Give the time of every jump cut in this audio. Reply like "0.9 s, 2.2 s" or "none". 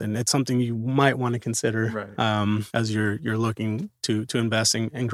2.7 s